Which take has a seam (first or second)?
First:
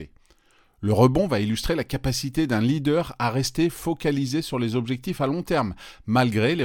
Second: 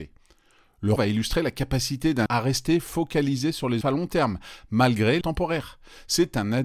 second